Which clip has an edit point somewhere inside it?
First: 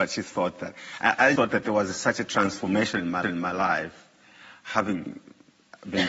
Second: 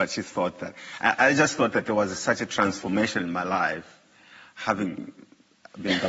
first; 2 cuts; at 1.4 s, 3.2 s

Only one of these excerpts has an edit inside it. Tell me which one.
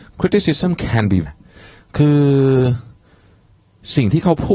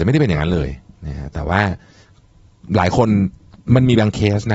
first; 1 cut; at 1.3 s

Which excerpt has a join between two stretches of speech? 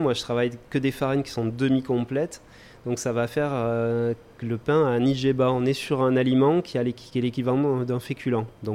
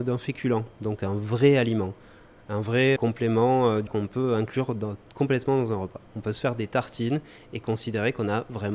second; 2 cuts; at 3.0 s, 3.9 s

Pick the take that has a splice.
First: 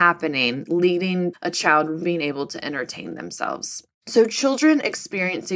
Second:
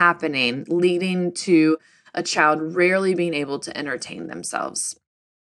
first; 3 cuts; at 1.3 s, 2.0 s, 3.9 s

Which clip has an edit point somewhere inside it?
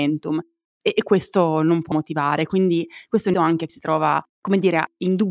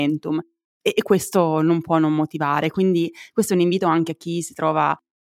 first; 4 cuts; at 1.9 s, 3.3 s, 3.7 s, 4.3 s

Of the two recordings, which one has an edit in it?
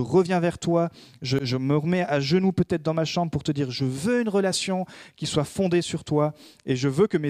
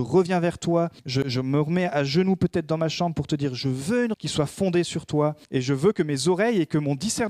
second; 3 cuts; at 1.0 s, 4.1 s, 5.4 s

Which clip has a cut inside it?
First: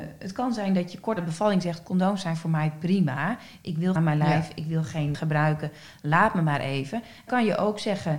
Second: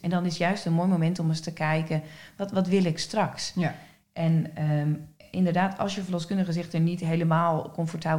first; 4 cuts; at 1.2 s, 4.0 s, 5.1 s, 7.3 s

